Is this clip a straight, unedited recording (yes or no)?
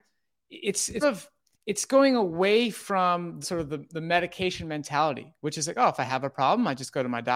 no